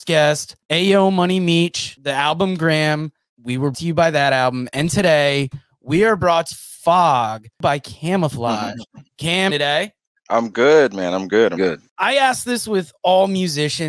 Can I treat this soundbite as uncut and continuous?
no; 4 cuts; at 3.7 s, 6.5 s, 9.5 s, 11.6 s

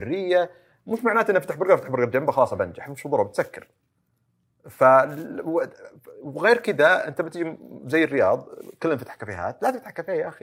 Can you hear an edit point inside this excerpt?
no; 0 cuts

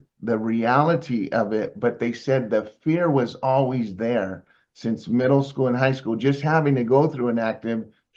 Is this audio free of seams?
yes; 0 cuts

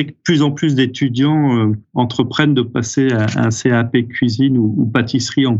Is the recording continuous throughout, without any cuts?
yes; 0 cuts

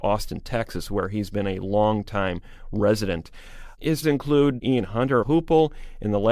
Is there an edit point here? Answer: yes; 2 cuts; at 4.0 s, 5.2 s

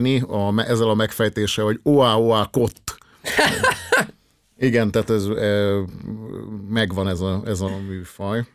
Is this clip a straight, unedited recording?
yes; 0 cuts

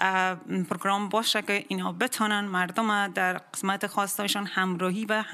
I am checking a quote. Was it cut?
no; 0 cuts

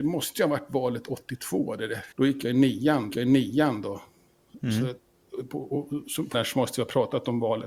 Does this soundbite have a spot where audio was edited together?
yes; 3 cuts; at 2.1 s, 3.1 s, 6.3 s

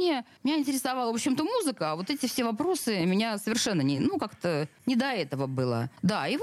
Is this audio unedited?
yes; 0 cuts

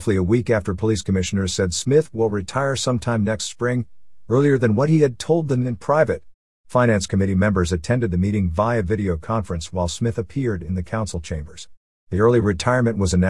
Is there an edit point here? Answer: no; 0 cuts

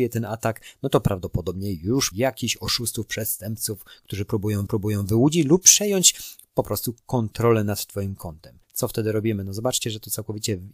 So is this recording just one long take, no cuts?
no; 4 cuts; at 2.1 s, 4.7 s, 7.0 s, 8.6 s

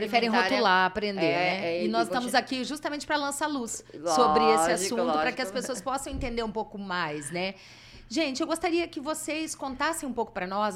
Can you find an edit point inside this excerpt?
no; 0 cuts

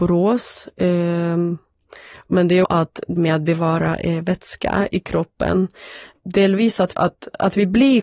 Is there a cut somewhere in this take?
yes; 3 cuts; at 2.6 s, 3.2 s, 6.9 s

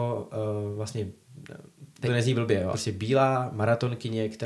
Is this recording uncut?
no; 2 cuts; at 2.1 s, 2.7 s

